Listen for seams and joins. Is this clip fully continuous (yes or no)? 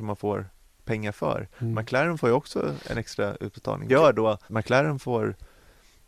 no